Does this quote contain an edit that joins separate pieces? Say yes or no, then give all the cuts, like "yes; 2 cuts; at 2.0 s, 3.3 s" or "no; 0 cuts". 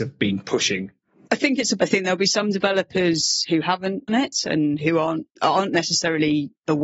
yes; 5 cuts; at 1.2 s, 1.8 s, 4.1 s, 4.8 s, 5.4 s